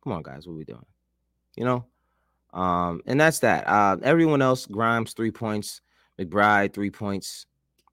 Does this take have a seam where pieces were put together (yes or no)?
no